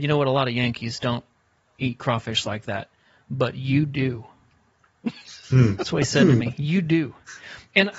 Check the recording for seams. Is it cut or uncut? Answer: uncut